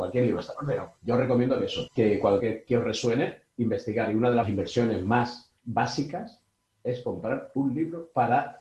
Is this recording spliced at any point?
yes; 6 cuts; at 1.0 s, 1.9 s, 2.4 s, 3.5 s, 4.4 s, 5.6 s

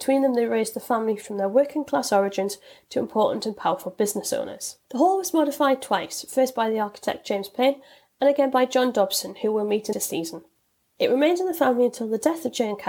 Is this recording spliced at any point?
yes; 2 cuts; at 4.8 s, 9.9 s

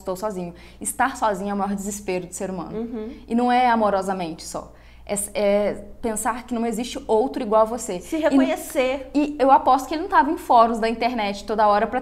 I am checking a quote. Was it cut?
no; 0 cuts

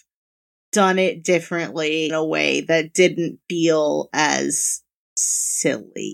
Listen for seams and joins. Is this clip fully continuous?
no; 1 cut; at 2.1 s

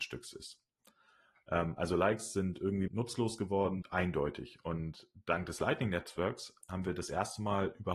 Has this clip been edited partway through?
yes; 3 cuts; at 2.9 s, 3.8 s, 6.6 s

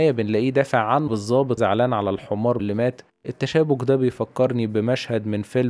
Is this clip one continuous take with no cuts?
no; 3 cuts; at 1.1 s, 1.6 s, 2.6 s

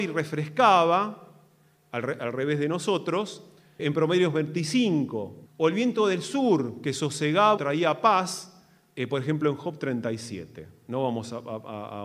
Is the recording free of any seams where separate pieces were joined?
no; 3 cuts; at 3.8 s, 5.5 s, 7.6 s

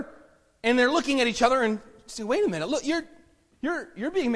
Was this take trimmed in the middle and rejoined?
no; 0 cuts

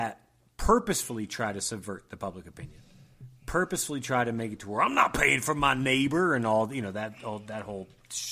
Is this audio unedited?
yes; 0 cuts

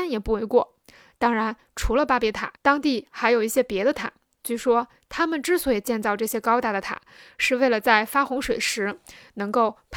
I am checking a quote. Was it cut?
yes; 1 cut; at 2.6 s

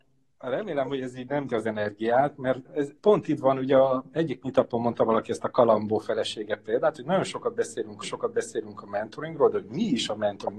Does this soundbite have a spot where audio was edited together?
yes; 4 cuts; at 1.5 s, 2.6 s, 3.0 s, 8.0 s

